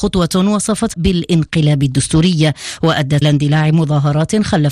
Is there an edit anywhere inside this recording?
yes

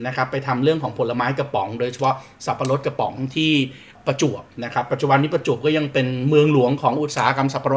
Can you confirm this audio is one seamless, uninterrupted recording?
yes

